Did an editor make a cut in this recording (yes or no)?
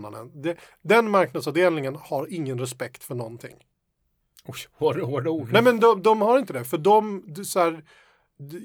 no